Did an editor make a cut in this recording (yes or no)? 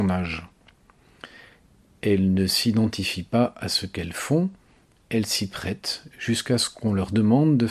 no